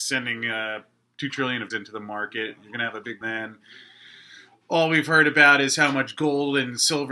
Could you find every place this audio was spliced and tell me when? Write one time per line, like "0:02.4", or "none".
0:01.7
0:03.2